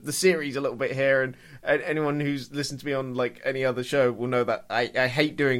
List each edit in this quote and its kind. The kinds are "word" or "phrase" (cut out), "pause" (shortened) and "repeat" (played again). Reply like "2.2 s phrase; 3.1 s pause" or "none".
none